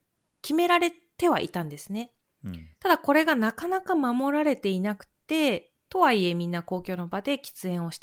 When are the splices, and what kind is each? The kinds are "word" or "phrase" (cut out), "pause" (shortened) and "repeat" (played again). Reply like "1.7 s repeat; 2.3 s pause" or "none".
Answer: 2.8 s pause; 5.8 s pause